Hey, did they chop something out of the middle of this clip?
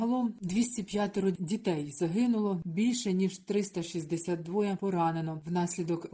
no; 0 cuts

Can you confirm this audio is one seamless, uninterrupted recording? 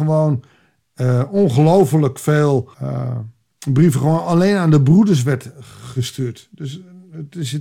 no; 1 cut; at 2.7 s

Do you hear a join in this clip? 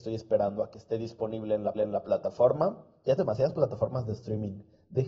yes; 2 cuts; at 1.7 s, 3.2 s

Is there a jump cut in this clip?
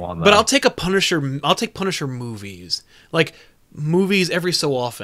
no; 0 cuts

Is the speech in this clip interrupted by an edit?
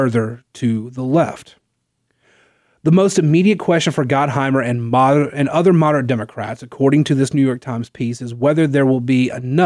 no; 0 cuts

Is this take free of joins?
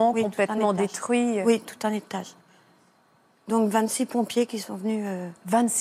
yes; 0 cuts

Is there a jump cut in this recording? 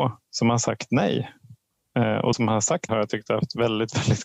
yes; 2 cuts; at 2.3 s, 2.9 s

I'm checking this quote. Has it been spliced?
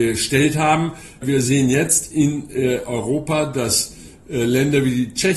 no; 0 cuts

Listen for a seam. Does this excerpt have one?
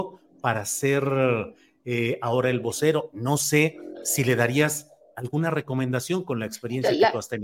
no; 0 cuts

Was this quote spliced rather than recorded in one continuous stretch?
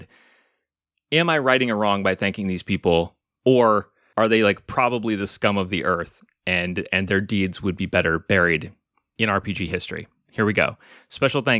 no; 0 cuts

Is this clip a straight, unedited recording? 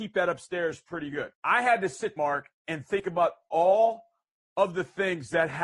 no; 3 cuts; at 1.4 s, 2.2 s, 2.9 s

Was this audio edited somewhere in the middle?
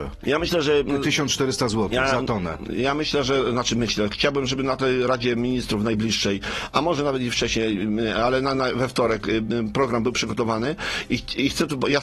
no; 0 cuts

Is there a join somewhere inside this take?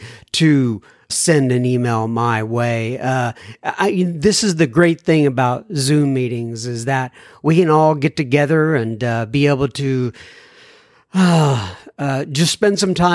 yes; 1 cut; at 1.1 s

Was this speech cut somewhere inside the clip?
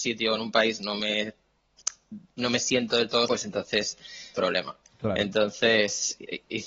yes; 2 cuts; at 3.3 s, 4.3 s

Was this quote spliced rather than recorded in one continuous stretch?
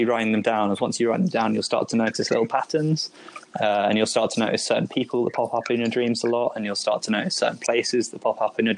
no; 0 cuts

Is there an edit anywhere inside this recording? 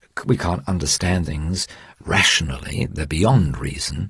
yes; 2 cuts; at 1.3 s, 2.9 s

